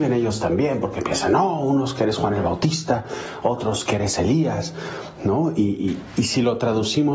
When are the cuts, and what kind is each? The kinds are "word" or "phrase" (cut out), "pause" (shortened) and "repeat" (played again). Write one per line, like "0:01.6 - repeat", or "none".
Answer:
none